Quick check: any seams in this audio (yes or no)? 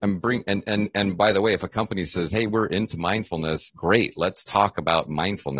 no